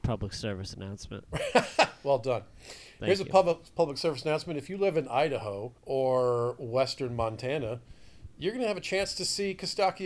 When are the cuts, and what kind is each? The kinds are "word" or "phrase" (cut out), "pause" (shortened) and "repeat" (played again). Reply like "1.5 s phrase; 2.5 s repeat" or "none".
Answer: 5.8 s pause